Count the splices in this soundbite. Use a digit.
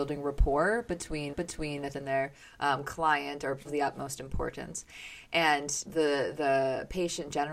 5